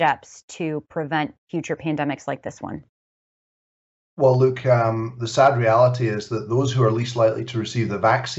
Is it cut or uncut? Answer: uncut